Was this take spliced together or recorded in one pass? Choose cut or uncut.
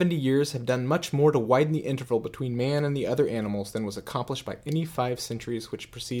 uncut